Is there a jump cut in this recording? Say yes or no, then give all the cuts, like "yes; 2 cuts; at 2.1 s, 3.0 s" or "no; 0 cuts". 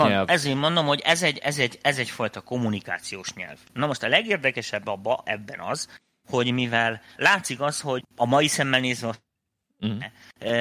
yes; 2 cuts; at 7.2 s, 8.0 s